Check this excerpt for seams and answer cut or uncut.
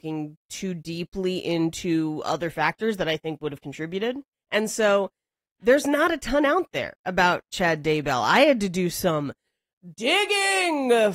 uncut